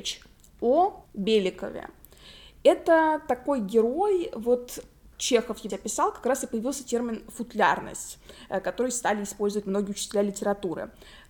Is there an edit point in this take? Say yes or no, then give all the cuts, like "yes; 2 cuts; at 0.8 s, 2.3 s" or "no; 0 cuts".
yes; 3 cuts; at 1.1 s, 5.1 s, 5.7 s